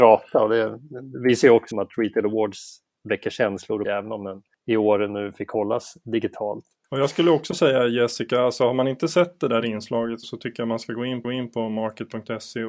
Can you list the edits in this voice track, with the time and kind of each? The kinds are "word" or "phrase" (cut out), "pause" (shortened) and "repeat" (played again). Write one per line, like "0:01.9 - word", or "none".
0:01.7 - word
0:03.8 - phrase
0:10.2 - word
0:11.2 - repeat